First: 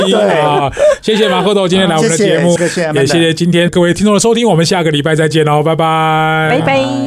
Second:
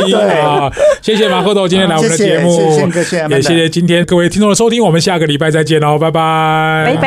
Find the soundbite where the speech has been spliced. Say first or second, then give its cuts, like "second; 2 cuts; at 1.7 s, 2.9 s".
first; 1 cut; at 2.6 s